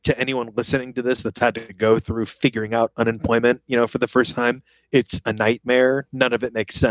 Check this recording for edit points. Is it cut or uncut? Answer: uncut